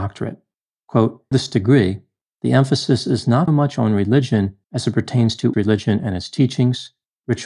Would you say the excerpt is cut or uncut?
cut